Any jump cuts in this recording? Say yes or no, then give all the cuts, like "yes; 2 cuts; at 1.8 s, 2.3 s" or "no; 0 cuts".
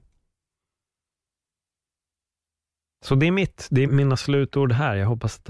yes; 1 cut; at 3.8 s